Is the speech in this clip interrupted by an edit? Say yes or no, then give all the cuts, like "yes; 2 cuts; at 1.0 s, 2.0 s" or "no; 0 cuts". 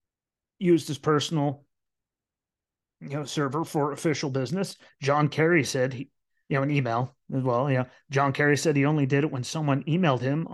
no; 0 cuts